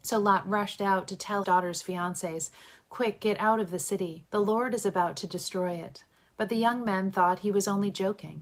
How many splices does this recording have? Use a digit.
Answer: 2